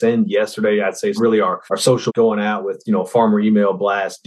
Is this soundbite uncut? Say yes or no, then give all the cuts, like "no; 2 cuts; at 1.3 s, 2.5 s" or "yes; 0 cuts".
no; 3 cuts; at 1.2 s, 1.7 s, 2.1 s